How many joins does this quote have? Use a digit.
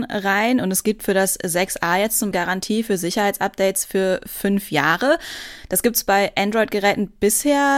1